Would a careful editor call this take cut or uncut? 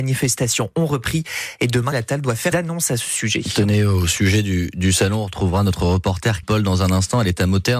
cut